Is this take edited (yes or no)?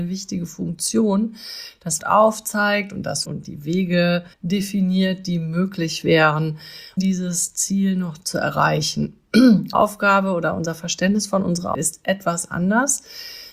yes